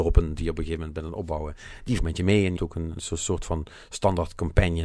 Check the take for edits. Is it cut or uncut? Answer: cut